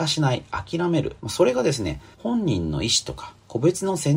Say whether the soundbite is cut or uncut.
cut